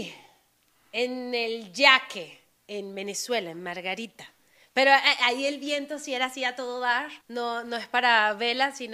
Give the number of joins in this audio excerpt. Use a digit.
1